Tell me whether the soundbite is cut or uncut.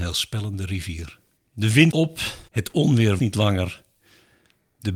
cut